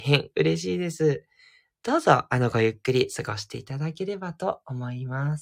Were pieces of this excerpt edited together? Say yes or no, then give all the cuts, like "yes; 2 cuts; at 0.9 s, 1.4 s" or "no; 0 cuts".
no; 0 cuts